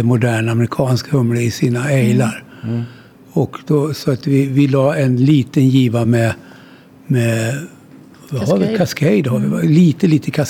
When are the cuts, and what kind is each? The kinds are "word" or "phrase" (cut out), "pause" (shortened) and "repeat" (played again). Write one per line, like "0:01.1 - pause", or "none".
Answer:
none

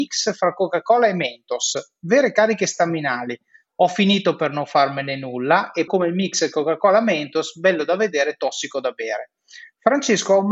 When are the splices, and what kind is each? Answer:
0:05.9 - word

